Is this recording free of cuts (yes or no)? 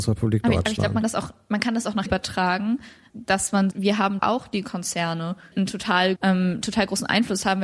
no